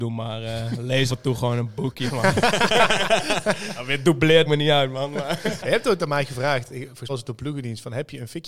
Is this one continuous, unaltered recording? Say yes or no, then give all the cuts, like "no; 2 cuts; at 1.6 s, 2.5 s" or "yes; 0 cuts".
no; 4 cuts; at 1.1 s, 4.5 s, 5.6 s, 7.1 s